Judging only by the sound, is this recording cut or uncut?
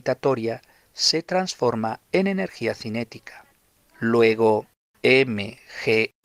uncut